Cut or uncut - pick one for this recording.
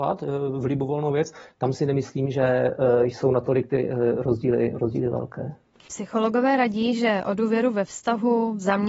uncut